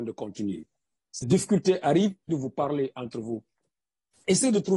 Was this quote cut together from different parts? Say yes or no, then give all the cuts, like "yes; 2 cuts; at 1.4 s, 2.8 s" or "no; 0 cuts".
yes; 2 cuts; at 1.2 s, 2.3 s